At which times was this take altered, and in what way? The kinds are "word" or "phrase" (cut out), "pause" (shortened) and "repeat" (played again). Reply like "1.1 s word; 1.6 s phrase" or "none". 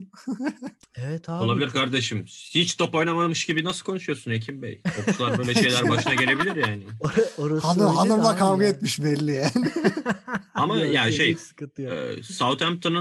none